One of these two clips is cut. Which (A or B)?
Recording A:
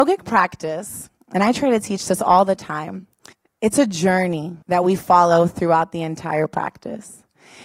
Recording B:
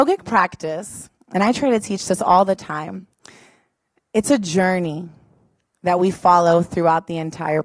A